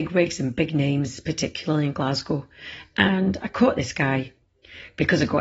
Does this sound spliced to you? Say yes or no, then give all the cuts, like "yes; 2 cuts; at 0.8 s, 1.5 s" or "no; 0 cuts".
no; 0 cuts